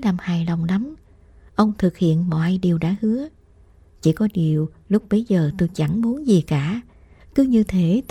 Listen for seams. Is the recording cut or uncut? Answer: uncut